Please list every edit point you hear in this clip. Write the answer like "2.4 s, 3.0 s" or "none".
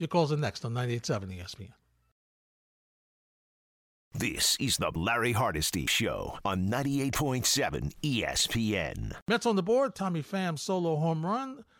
none